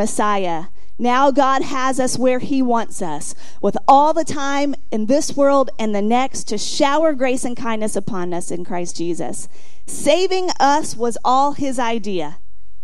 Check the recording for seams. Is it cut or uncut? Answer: uncut